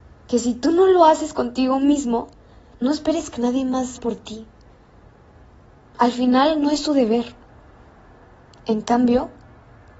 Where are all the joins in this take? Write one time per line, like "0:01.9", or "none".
0:04.0